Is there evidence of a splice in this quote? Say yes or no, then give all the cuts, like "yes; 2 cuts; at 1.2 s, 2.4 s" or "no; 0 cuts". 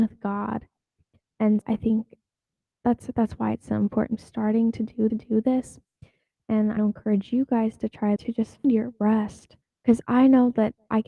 yes; 8 cuts; at 1.6 s, 2.3 s, 4.2 s, 5.1 s, 6.8 s, 8.2 s, 8.6 s, 9.6 s